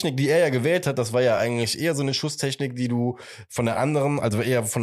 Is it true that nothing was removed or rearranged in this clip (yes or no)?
yes